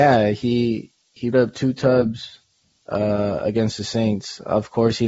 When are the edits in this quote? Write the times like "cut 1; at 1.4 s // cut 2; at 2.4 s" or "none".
cut 1; at 1.3 s // cut 2; at 2.6 s

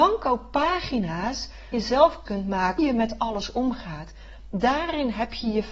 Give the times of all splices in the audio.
cut 1; at 1.7 s // cut 2; at 2.3 s // cut 3; at 2.8 s

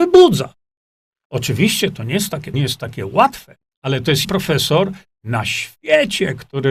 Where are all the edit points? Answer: cut 1; at 2.5 s // cut 2; at 3.7 s // cut 3; at 4.2 s

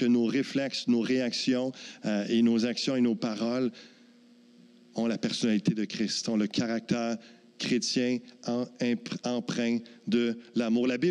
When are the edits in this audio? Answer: none

